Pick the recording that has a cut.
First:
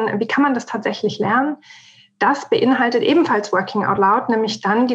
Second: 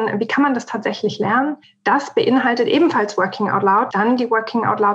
second; 2 cuts; at 1.6 s, 3.9 s

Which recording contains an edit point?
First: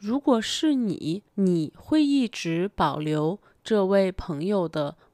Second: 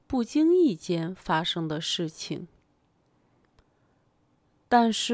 first; 1 cut; at 1.3 s

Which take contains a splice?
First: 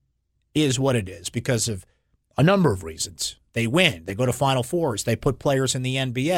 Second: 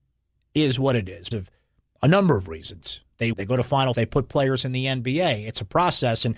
second; 3 cuts; at 1.3 s, 3.3 s, 3.9 s

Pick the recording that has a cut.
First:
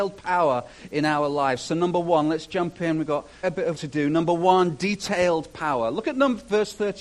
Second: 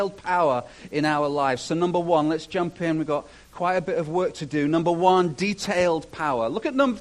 first; 2 cuts; at 3.4 s, 3.7 s

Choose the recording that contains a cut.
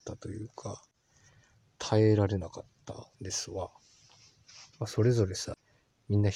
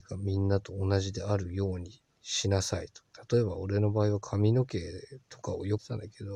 first; 2 cuts; at 3.1 s, 4.7 s

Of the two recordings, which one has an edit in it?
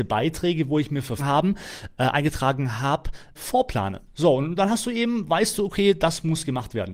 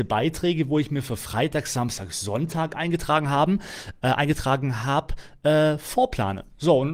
first; 2 cuts; at 1.2 s, 3.3 s

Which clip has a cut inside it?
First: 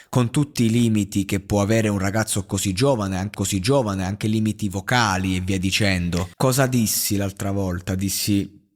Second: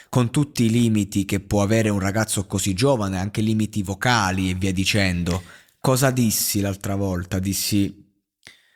first; 2 cuts; at 3.3 s, 6.3 s

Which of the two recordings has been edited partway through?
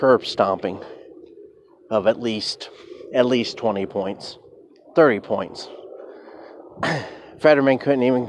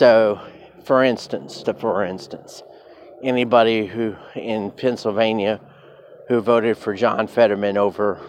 second; 1 cut; at 1.6 s

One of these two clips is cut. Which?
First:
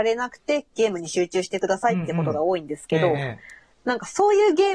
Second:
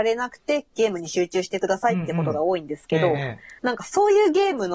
second; 1 cut; at 3.6 s

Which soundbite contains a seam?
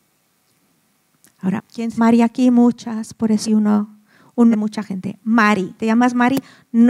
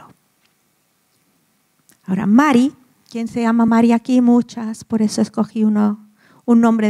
first; 5 cuts; at 1.6 s, 2.0 s, 3.4 s, 4.5 s, 5.8 s

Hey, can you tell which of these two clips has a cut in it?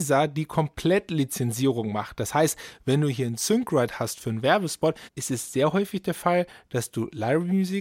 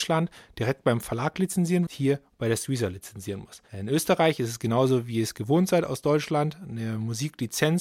second; 1 cut; at 1.9 s

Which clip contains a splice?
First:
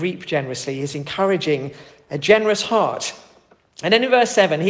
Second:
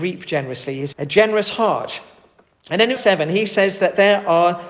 second; 2 cuts; at 0.9 s, 3.0 s

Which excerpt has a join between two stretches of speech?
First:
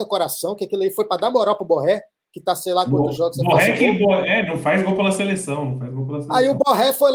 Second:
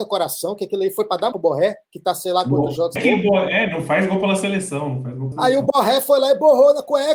second; 4 cuts; at 1.3 s, 1.8 s, 3.0 s, 5.3 s

